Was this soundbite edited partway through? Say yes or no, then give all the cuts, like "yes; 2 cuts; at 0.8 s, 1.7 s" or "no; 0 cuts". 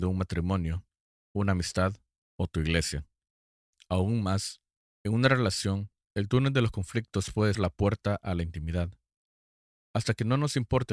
yes; 1 cut; at 7.5 s